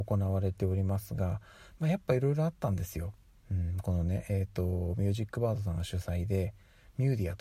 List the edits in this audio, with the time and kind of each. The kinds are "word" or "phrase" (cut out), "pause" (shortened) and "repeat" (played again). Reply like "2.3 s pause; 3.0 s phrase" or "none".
none